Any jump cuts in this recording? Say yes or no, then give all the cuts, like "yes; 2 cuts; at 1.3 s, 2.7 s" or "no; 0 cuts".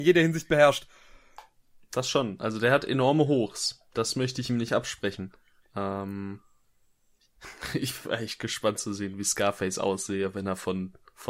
no; 0 cuts